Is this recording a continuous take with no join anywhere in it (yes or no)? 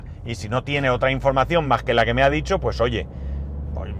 yes